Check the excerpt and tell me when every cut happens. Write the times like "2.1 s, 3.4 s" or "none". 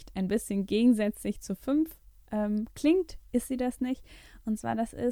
none